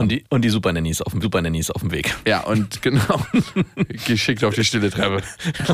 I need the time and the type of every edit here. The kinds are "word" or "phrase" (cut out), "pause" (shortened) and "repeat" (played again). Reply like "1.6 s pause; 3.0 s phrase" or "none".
1.2 s repeat